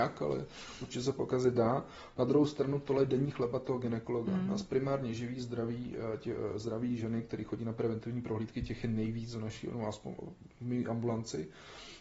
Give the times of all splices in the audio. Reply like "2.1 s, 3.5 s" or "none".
none